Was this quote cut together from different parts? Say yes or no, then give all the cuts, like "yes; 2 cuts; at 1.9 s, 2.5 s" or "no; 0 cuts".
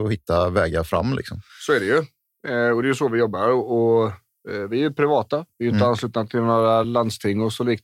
no; 0 cuts